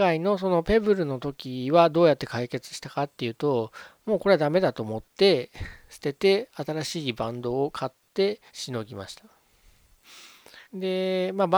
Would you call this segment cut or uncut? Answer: cut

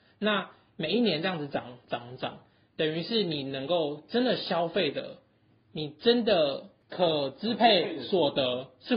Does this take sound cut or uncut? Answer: uncut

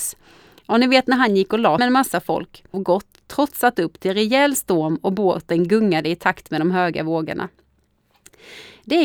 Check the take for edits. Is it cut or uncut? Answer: cut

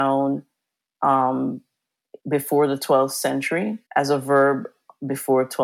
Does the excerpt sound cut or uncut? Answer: cut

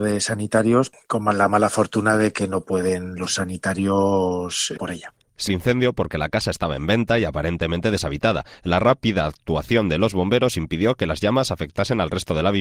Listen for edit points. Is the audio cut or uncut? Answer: cut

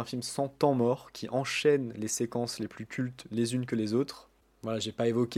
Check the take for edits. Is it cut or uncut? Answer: uncut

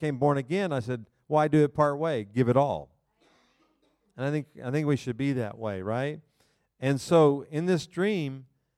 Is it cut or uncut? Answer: uncut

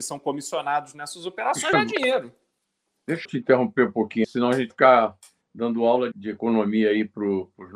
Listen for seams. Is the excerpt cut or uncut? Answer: cut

